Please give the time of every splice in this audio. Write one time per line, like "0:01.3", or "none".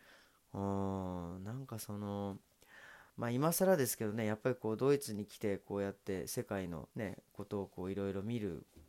0:03.1
0:06.9